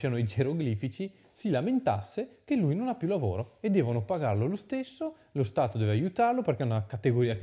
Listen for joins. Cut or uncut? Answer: uncut